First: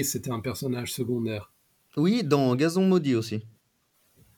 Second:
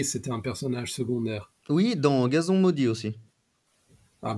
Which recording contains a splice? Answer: second; 1 cut; at 1.6 s

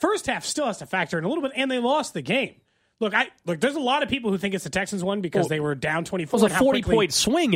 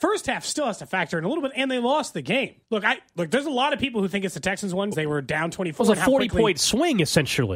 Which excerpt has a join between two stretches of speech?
second; 2 cuts; at 2.6 s, 4.9 s

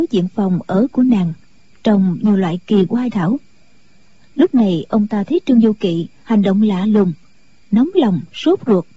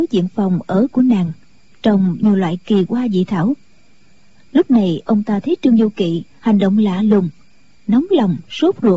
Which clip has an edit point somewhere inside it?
first; 1 cut; at 3.1 s

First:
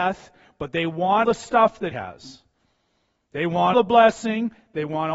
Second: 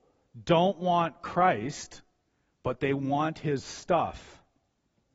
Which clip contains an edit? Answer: first; 3 cuts; at 1.2 s, 1.9 s, 3.7 s

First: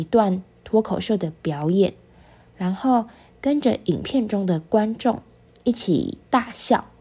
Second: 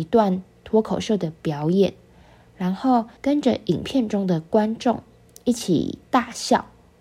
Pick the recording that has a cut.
second; 1 cut; at 3.2 s

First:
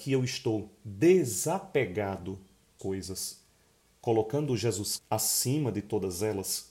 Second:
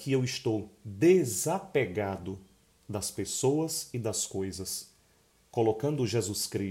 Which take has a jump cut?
first; 2 cuts; at 2.8 s, 5.0 s

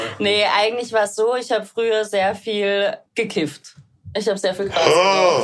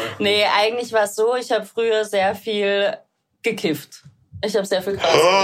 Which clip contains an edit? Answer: first; 1 cut; at 3.1 s

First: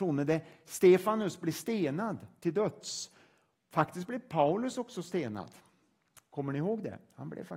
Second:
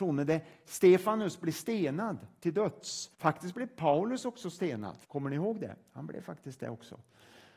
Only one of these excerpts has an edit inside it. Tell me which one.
second; 2 cuts; at 3.1 s, 5.0 s

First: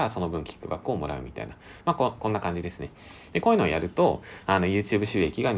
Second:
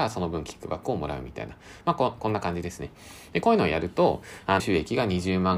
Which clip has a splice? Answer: second; 1 cut; at 4.6 s

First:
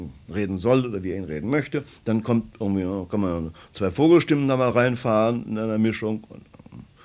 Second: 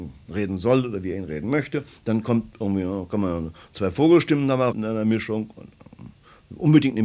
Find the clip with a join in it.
second; 1 cut; at 4.7 s

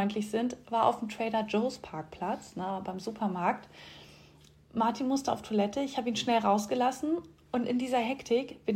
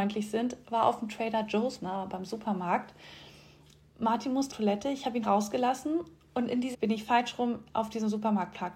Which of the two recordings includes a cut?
second; 4 cuts; at 1.8 s, 4.5 s, 5.2 s, 6.7 s

